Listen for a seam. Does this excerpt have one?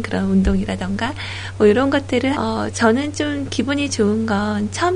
yes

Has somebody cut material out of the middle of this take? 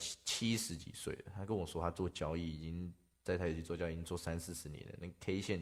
no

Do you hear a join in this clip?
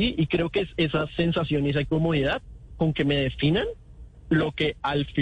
no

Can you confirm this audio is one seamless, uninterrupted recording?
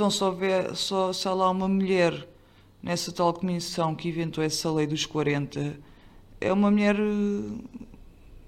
yes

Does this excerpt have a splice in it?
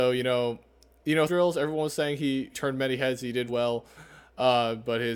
yes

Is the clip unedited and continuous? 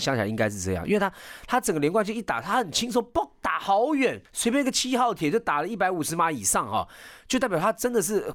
no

